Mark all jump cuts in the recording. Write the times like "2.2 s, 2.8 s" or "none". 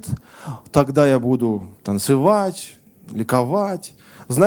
1.8 s